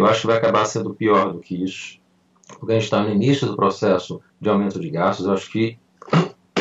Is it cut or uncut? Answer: cut